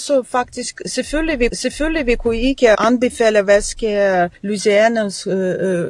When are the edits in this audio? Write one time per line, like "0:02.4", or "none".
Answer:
0:01.5
0:02.7
0:04.3